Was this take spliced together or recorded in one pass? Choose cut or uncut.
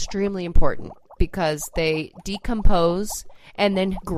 uncut